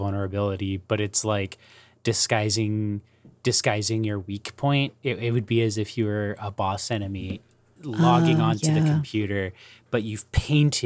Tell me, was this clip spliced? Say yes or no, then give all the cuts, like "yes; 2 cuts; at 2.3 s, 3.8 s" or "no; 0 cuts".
no; 0 cuts